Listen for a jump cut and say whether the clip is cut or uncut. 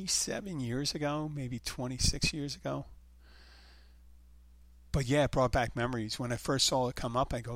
uncut